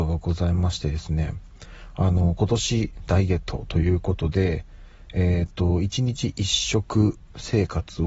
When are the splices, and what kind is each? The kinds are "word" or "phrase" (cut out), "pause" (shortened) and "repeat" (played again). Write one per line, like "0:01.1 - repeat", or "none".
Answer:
none